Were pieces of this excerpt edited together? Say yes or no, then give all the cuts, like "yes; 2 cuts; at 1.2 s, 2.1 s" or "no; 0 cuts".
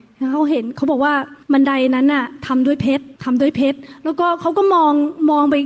yes; 2 cuts; at 1.4 s, 3.2 s